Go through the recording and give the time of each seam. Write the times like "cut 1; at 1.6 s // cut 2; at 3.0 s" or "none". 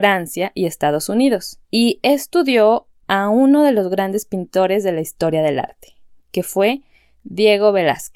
cut 1; at 1.6 s